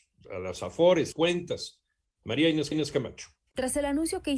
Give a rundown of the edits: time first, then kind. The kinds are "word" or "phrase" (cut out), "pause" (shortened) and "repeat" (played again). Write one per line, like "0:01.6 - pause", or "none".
0:01.1 - phrase
0:02.7 - repeat